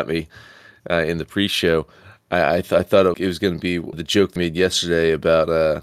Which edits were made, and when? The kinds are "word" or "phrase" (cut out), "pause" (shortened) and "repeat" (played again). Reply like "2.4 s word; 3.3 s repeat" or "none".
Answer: 3.1 s word; 3.9 s word; 4.4 s word

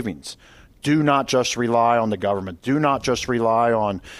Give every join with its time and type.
none

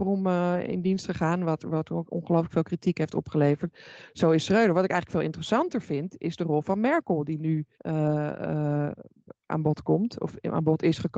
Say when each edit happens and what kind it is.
7.7 s pause

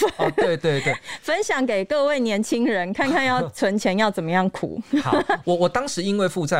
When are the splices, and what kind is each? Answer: none

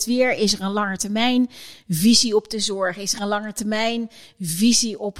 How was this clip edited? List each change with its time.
none

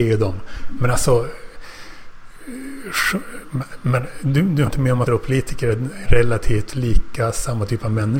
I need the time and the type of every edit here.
4.7 s word; 5.1 s word; 6.0 s word

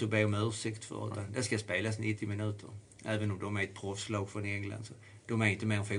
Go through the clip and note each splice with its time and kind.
none

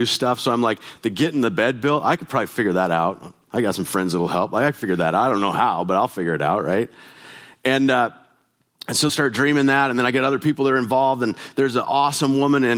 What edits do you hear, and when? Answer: 3.4 s pause; 9.1 s phrase

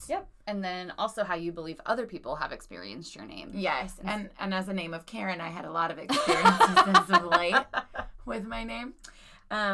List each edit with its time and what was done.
none

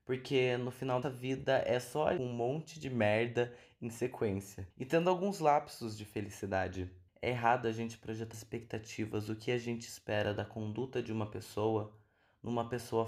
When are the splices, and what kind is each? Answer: 1.0 s phrase; 2.2 s phrase; 4.7 s pause; 7.1 s pause; 8.3 s word

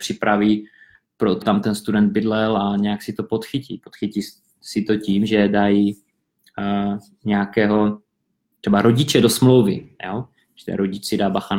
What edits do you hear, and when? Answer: 1.4 s word

